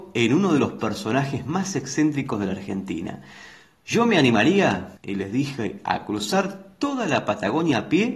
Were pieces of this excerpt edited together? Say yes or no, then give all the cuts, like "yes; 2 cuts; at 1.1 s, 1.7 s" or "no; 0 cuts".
yes; 1 cut; at 5.0 s